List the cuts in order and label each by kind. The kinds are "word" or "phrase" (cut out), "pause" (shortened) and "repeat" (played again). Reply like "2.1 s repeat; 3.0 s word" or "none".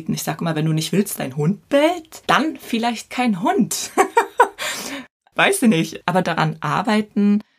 1.2 s word; 5.3 s word; 6.2 s phrase